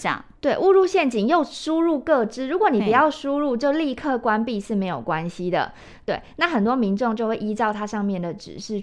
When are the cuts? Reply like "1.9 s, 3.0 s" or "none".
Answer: none

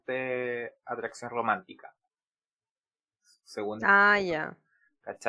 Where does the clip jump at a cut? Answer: none

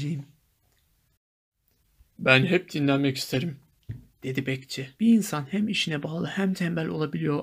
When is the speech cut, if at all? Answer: 5.0 s

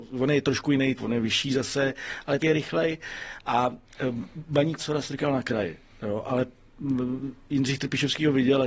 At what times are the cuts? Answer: 1.0 s, 2.4 s, 4.8 s

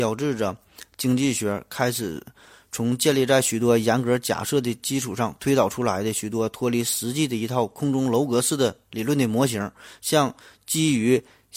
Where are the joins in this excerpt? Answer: none

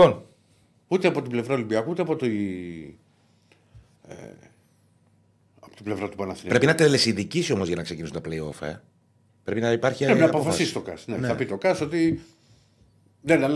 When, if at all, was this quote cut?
none

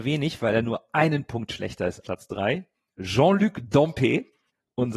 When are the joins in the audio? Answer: 2.0 s

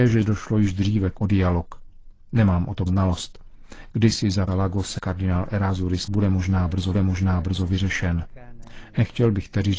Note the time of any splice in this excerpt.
1.2 s, 2.9 s, 4.5 s, 5.0 s, 6.1 s, 6.9 s

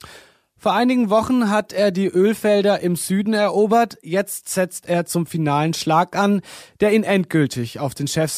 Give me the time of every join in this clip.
none

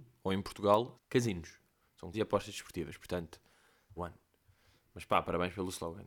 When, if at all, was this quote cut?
0.9 s, 2.1 s, 4.0 s

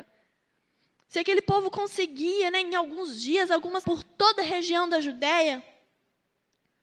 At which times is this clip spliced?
3.8 s

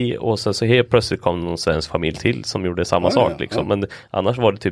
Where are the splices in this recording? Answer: none

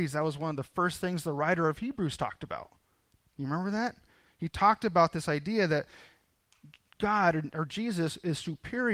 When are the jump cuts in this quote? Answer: none

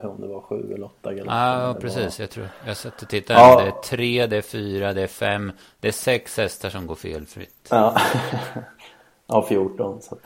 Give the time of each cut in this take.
none

